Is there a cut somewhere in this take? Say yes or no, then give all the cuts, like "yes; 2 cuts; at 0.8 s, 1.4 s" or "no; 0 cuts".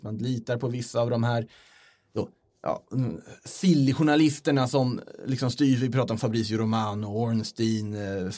no; 0 cuts